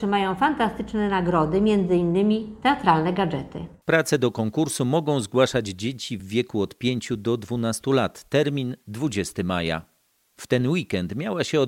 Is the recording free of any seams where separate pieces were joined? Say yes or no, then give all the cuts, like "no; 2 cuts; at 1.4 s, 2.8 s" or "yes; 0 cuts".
yes; 0 cuts